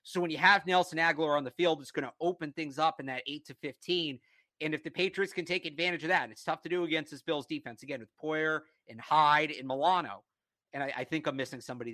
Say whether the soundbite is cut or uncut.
uncut